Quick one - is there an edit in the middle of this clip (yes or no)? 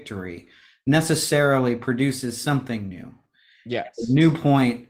no